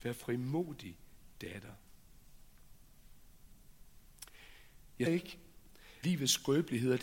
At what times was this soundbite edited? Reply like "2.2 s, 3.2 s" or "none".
5.1 s, 6.0 s